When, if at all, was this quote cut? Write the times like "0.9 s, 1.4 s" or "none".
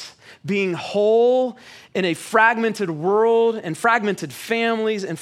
none